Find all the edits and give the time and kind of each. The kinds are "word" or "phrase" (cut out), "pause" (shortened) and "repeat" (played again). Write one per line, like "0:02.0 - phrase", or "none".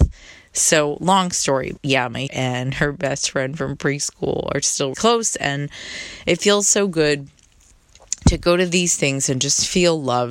0:01.8 - word
0:02.3 - word
0:04.9 - word